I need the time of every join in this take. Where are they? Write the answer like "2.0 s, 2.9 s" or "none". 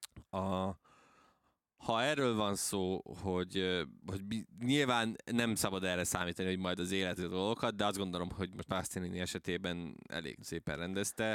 4.0 s, 7.2 s, 8.7 s, 10.4 s